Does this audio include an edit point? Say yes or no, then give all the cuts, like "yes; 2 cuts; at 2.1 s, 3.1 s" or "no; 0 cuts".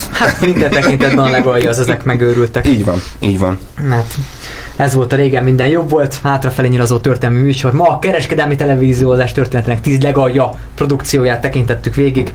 no; 0 cuts